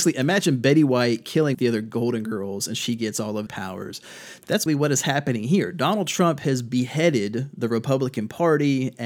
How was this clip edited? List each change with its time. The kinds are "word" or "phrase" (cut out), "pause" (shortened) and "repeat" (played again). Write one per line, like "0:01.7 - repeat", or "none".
0:01.5 - word
0:03.5 - word
0:04.7 - word